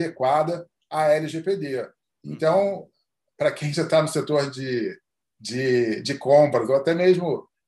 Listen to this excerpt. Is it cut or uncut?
uncut